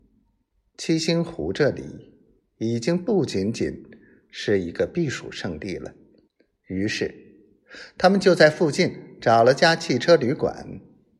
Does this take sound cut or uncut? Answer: cut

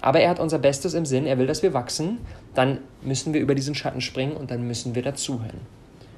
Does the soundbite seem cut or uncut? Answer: uncut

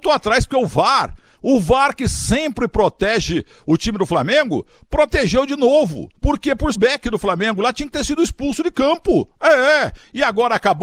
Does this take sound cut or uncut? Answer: cut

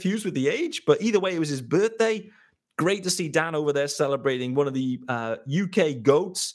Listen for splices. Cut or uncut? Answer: uncut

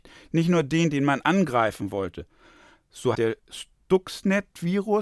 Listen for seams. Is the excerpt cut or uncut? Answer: cut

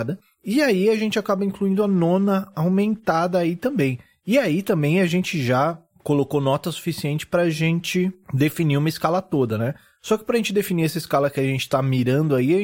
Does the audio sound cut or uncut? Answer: uncut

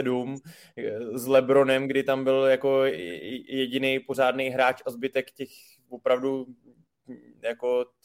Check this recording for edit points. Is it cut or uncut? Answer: uncut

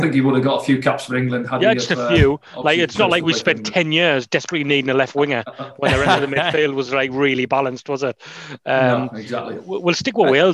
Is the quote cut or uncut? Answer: uncut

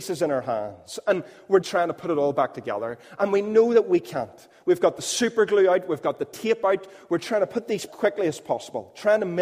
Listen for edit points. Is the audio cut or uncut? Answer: cut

